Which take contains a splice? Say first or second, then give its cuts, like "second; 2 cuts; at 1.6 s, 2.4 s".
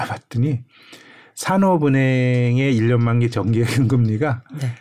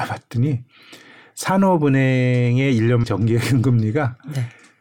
second; 1 cut; at 3.0 s